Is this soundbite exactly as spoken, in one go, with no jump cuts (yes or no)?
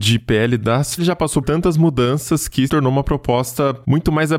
no